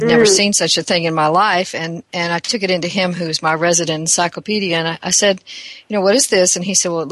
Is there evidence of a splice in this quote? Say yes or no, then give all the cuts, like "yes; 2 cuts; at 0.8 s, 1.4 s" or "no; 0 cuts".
no; 0 cuts